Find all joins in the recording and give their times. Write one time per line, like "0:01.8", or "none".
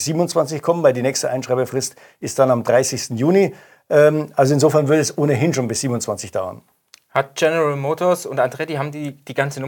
none

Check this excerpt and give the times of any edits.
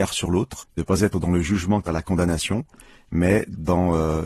0:01.9

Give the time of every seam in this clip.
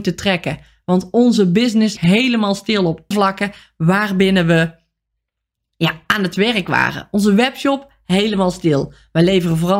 0:02.0
0:03.1

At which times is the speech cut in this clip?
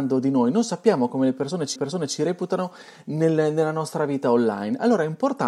0:01.8

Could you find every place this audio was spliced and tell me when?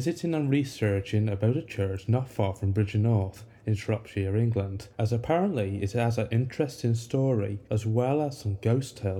0:04.9
0:07.6

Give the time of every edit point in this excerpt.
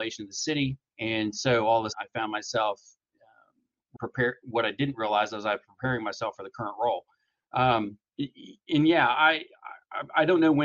0:00.9
0:01.9
0:04.0
0:08.1

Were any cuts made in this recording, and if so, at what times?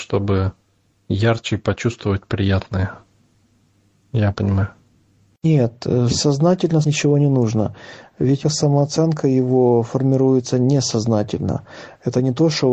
0:04.3
0:06.8
0:08.4

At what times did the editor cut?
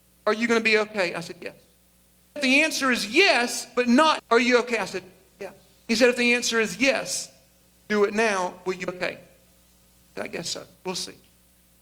0:02.4
0:04.2
0:08.9

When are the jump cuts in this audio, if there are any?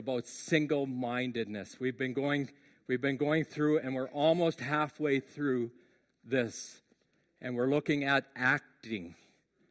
none

